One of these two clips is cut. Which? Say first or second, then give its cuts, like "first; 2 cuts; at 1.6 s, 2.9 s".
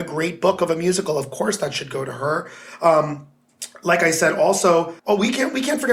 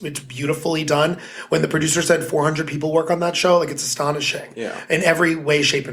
first; 1 cut; at 5.0 s